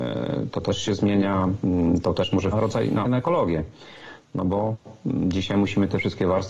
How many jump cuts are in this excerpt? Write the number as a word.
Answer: two